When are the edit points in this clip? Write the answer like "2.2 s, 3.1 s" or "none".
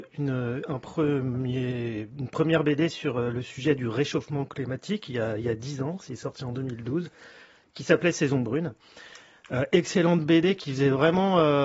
none